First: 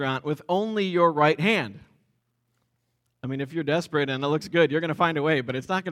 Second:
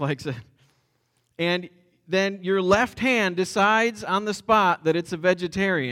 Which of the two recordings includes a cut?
first; 1 cut; at 2.2 s

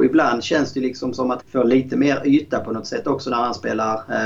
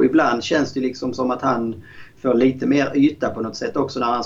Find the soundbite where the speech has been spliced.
first; 1 cut; at 1.4 s

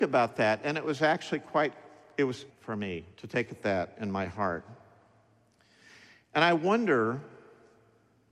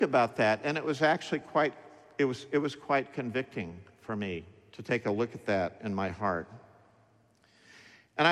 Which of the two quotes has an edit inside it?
first; 3 cuts; at 2.5 s, 3.1 s, 3.5 s

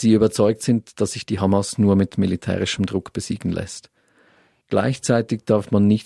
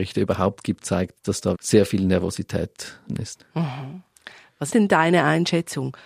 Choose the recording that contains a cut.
second; 3 cuts; at 1.5 s, 3.1 s, 4.7 s

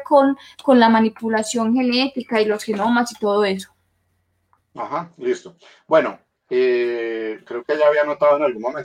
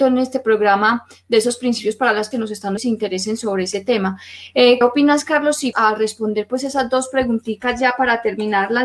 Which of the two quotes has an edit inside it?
second; 4 cuts; at 2.3 s, 2.8 s, 4.8 s, 5.7 s

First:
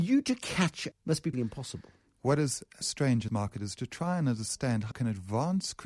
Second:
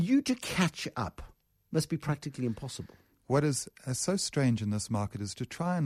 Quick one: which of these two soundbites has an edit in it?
first; 5 cuts; at 0.9 s, 1.3 s, 2.8 s, 3.3 s, 4.9 s

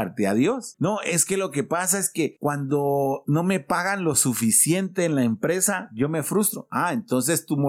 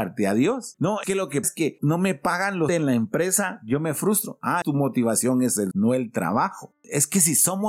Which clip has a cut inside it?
second; 6 cuts; at 1.0 s, 1.4 s, 1.8 s, 2.7 s, 4.6 s, 5.7 s

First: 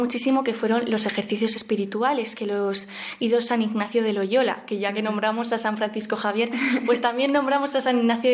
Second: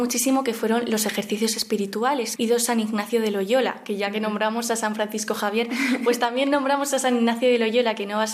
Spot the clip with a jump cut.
second; 1 cut; at 2.4 s

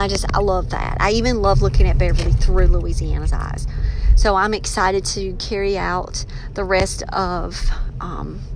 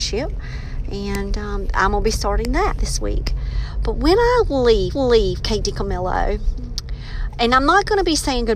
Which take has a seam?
second; 1 cut; at 4.9 s

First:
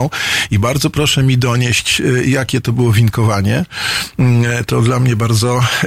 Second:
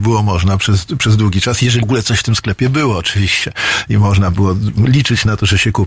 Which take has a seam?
second; 1 cut; at 1.8 s

